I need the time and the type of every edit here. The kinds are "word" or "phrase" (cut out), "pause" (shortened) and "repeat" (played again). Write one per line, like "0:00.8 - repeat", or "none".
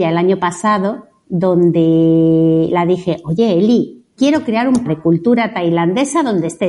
0:04.2 - word
0:04.8 - word